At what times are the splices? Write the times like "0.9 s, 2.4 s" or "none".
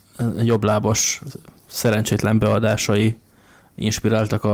none

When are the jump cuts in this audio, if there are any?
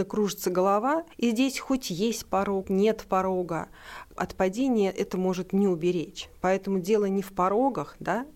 1.1 s, 2.6 s, 4.2 s

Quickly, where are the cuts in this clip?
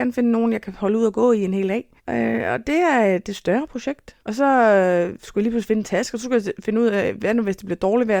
2.0 s, 4.2 s

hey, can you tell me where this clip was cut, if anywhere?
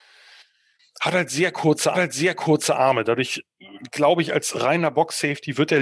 1.9 s, 4.5 s

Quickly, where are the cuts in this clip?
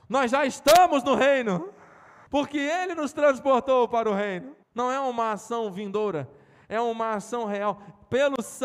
2.3 s, 4.6 s

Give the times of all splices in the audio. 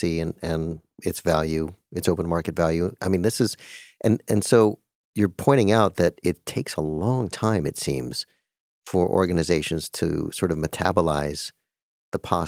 none

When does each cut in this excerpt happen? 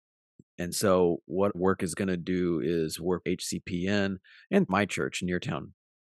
1.5 s, 3.2 s, 4.7 s

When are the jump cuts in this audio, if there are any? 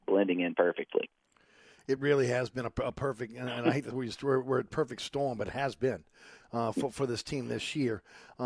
none

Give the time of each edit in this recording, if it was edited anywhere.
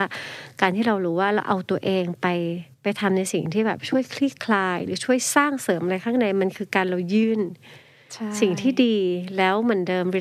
2.7 s

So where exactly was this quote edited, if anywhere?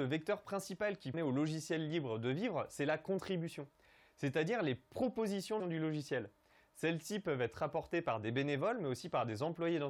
1.1 s, 5.6 s

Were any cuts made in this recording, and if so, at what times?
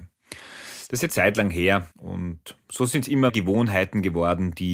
1.1 s, 1.9 s, 3.3 s

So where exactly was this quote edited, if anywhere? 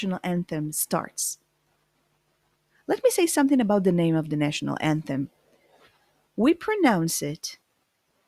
none

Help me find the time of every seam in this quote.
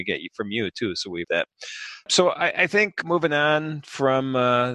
1.2 s, 3.0 s

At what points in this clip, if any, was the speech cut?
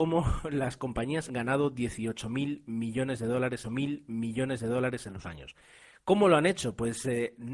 1.3 s, 3.6 s, 5.2 s

